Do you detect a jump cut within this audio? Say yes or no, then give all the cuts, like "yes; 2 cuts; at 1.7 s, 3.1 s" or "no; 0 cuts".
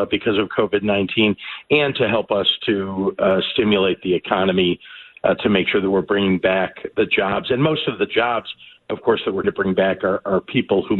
yes; 1 cut; at 9.4 s